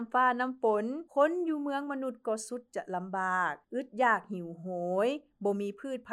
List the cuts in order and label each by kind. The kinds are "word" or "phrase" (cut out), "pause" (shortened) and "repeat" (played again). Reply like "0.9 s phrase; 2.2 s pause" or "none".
1.1 s pause; 3.6 s pause